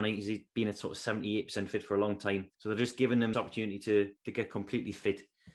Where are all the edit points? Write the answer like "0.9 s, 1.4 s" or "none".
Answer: 2.5 s, 3.3 s, 4.2 s